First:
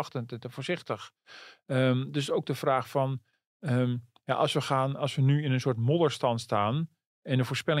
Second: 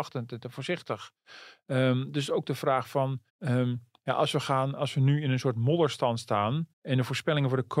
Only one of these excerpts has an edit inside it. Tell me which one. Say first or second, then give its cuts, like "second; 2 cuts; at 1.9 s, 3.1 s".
second; 2 cuts; at 3.3 s, 6.7 s